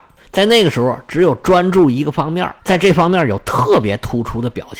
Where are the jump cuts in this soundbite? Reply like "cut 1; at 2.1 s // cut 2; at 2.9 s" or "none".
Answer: cut 1; at 2.6 s